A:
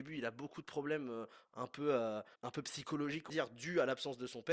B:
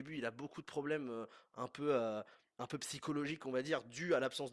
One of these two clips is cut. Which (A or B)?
A